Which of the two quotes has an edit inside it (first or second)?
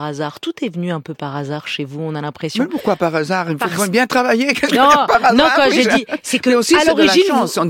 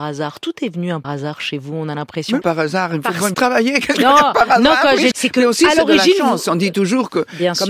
second